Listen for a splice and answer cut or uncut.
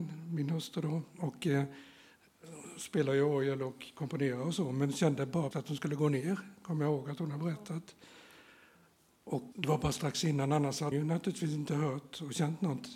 cut